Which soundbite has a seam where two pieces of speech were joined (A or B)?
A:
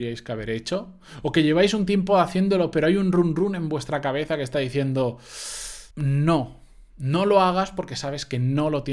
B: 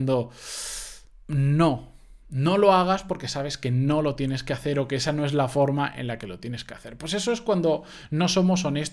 A